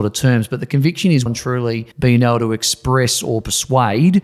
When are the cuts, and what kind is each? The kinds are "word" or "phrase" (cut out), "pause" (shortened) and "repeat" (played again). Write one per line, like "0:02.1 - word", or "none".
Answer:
0:01.3 - word
0:01.9 - pause